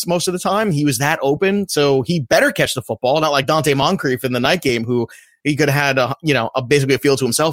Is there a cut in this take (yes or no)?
no